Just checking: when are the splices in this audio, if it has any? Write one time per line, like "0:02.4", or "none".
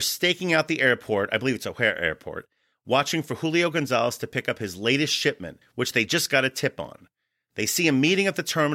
none